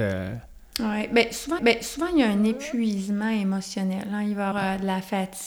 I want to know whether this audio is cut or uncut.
cut